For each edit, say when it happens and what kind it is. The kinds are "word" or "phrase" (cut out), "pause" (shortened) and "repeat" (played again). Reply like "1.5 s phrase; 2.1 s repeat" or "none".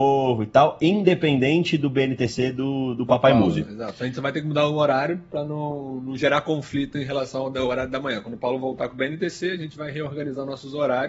none